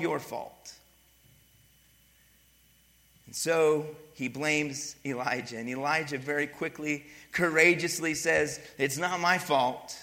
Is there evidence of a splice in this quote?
no; 0 cuts

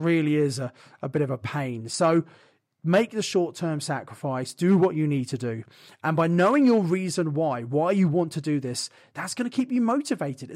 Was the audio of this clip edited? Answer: no; 0 cuts

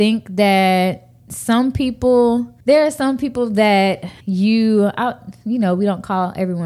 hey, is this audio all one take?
no; 2 cuts; at 2.6 s, 4.2 s

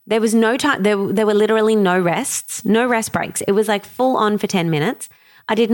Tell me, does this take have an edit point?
no; 0 cuts

